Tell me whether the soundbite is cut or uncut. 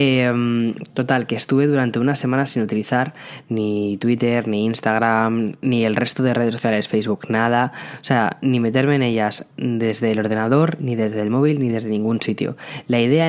uncut